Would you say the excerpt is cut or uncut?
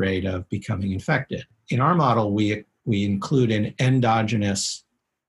uncut